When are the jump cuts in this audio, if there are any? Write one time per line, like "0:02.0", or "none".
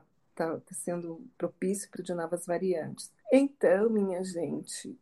0:01.3
0:02.0
0:03.2

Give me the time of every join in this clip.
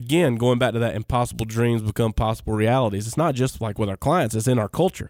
none

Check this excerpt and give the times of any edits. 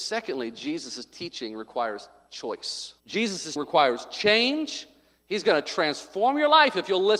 0:03.0
0:03.6

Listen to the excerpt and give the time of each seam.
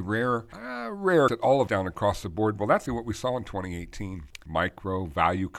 0:01.3
0:01.7
0:02.9
0:04.4

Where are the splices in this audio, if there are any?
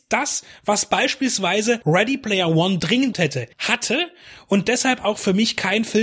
0:03.1
0:03.5

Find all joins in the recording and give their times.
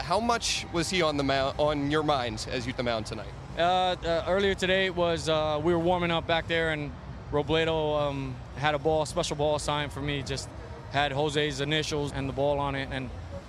0:02.7
0:12.1

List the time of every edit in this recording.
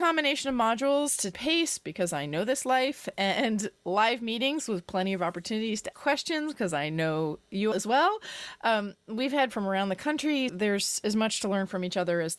0:01.3
0:03.8
0:05.9
0:07.7
0:09.5
0:10.5

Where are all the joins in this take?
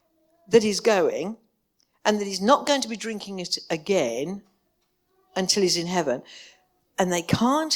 none

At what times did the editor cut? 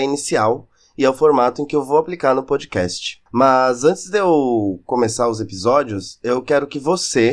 0:03.3

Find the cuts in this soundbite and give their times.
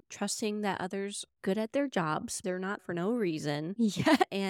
0:01.3
0:02.4
0:02.8

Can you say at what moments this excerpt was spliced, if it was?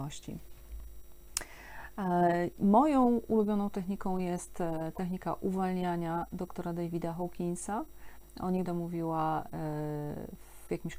0:08.7

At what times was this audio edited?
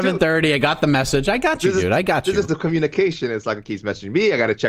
0:02.5

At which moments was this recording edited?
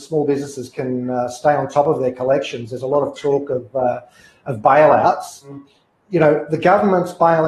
none

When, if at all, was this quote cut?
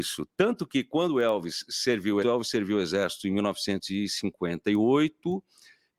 0:02.2

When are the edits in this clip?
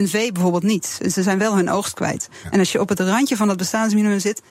none

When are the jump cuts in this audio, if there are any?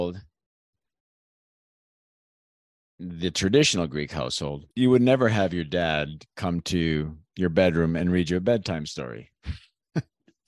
0:04.7

